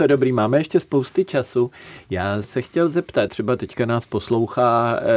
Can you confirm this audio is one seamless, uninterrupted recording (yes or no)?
no